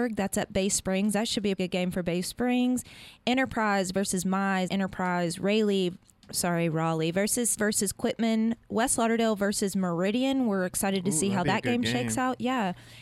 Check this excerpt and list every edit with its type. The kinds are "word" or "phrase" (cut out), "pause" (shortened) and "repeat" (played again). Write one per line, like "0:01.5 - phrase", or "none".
0:01.6 - word
0:04.7 - word
0:07.6 - phrase

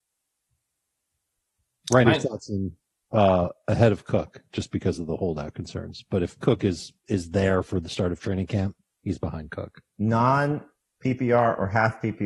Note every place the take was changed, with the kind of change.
0:02.1 - word
0:09.9 - pause

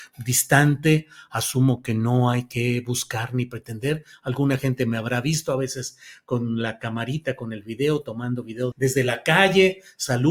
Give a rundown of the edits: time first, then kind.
0:08.7 - word

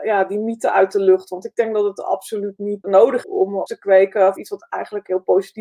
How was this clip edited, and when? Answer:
0:02.8 - word
0:03.2 - word
0:03.7 - word
0:04.4 - word

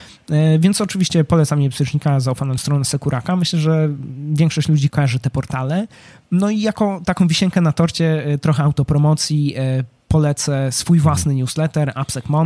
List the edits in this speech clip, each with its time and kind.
0:02.6 - word
0:04.9 - word

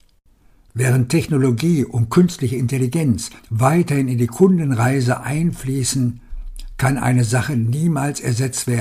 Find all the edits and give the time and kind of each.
0:03.4 - pause

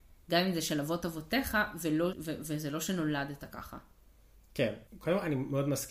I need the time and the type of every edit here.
0:02.1 - word
0:04.9 - pause

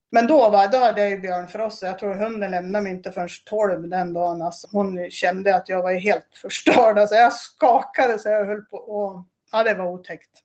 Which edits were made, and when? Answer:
0:04.6 - word

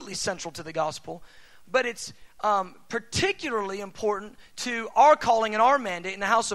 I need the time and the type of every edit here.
none

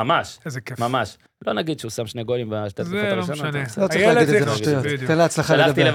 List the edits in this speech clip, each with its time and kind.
0:01.3 - pause
0:04.4 - word

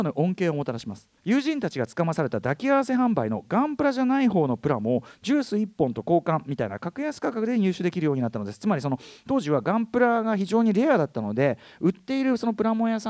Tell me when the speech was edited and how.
0:01.2 - pause

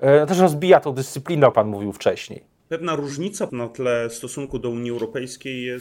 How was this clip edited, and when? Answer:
0:01.5 - word
0:02.6 - pause
0:03.5 - word

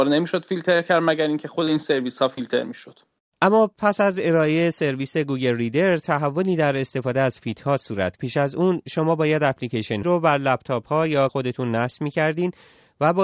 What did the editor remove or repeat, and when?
0:08.2 - word
0:10.0 - word
0:11.3 - word

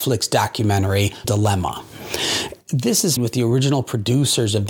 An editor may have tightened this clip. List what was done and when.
0:01.2 - word
0:03.2 - word

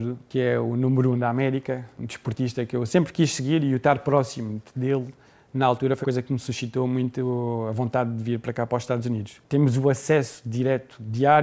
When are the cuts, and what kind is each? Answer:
0:04.7 - phrase
0:06.0 - word

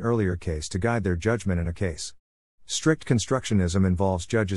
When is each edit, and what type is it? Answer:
0:01.7 - word

